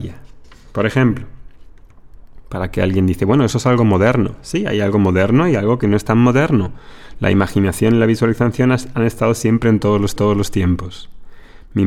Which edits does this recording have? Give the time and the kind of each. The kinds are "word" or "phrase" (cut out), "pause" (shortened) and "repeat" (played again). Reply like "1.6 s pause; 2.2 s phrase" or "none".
10.2 s repeat